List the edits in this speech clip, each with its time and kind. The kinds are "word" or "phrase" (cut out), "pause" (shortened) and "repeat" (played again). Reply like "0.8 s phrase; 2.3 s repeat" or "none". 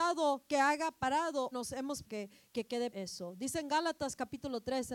1.5 s word; 2.0 s word; 2.9 s word